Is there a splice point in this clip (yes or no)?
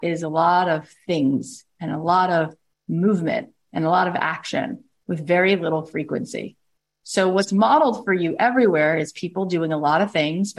no